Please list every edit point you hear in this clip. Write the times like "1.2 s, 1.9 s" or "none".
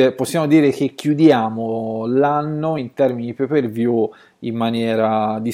none